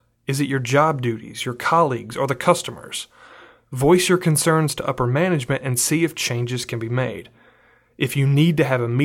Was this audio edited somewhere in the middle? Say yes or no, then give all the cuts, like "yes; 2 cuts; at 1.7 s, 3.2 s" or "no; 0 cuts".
no; 0 cuts